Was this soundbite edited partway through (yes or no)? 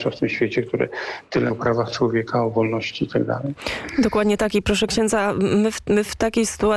yes